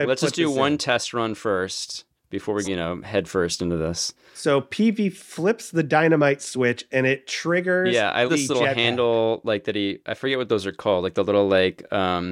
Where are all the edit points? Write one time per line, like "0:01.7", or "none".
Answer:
0:02.6
0:08.3

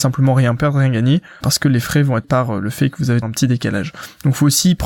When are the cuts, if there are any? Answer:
0:01.4
0:02.2
0:03.2

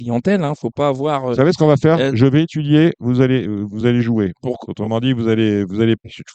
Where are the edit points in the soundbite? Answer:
none

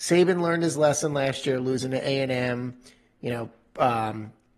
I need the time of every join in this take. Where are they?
none

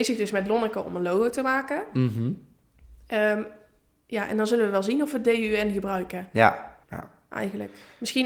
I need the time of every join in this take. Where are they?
0:06.8

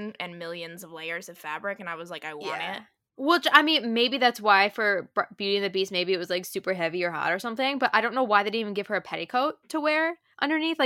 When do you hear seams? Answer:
none

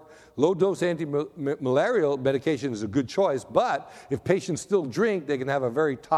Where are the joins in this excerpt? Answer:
none

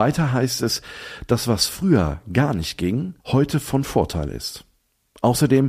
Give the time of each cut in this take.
0:03.2

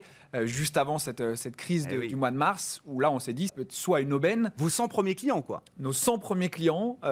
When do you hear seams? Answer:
0:03.5

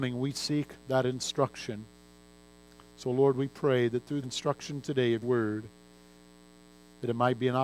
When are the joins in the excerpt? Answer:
0:04.2
0:05.2

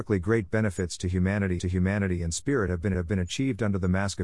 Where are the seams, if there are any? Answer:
0:01.6
0:02.9

